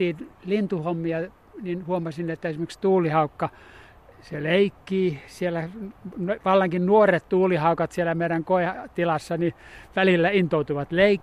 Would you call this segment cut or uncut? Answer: uncut